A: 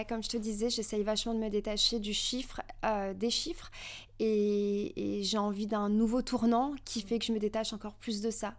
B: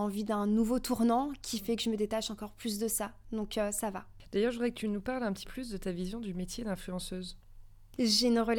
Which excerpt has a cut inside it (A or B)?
B